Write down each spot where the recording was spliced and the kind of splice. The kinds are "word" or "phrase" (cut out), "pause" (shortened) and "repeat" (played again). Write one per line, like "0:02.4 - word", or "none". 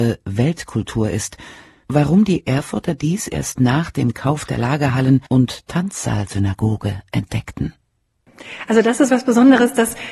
0:01.8 - word
0:05.3 - pause
0:09.1 - word